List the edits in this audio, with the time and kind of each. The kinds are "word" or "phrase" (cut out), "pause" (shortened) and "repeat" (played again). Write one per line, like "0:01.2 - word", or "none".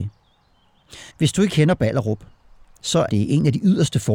0:01.1 - pause
0:01.5 - word
0:03.1 - word